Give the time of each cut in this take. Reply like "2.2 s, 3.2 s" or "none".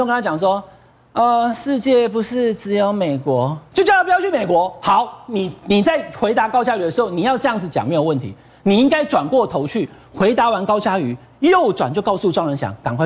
none

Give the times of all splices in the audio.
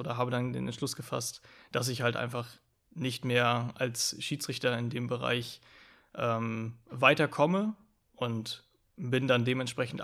none

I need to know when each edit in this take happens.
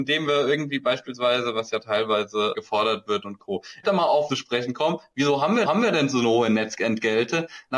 2.5 s, 3.2 s, 3.8 s, 4.3 s, 5.7 s

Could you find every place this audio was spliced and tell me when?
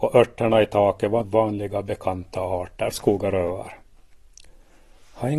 1.2 s, 2.9 s

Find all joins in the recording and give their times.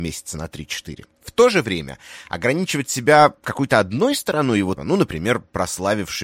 1.1 s, 4.8 s

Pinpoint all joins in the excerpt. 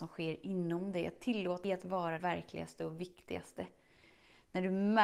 1.6 s, 2.2 s

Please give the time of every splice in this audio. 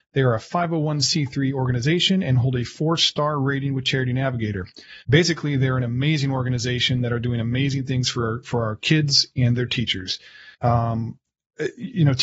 5.0 s, 10.5 s

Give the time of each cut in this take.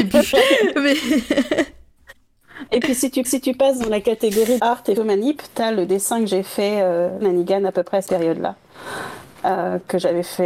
3.2 s, 4.6 s, 5.0 s, 7.2 s, 8.1 s

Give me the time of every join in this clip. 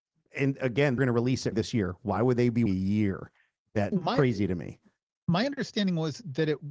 1.0 s, 1.5 s, 2.7 s, 3.9 s

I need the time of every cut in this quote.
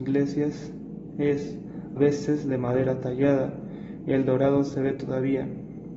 2.0 s

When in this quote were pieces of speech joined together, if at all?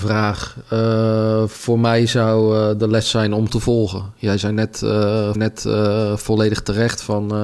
3.5 s, 5.4 s

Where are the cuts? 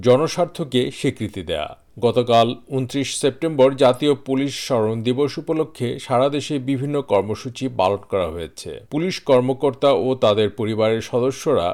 1.9 s, 8.8 s

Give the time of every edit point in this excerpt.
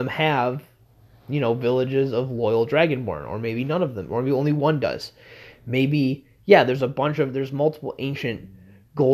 none

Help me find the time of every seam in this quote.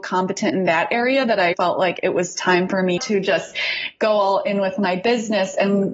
1.5 s, 3.0 s

